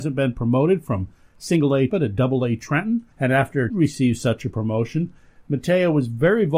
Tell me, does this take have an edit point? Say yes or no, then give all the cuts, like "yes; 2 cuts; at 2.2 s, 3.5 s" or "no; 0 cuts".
yes; 3 cuts; at 1.9 s, 3.1 s, 3.7 s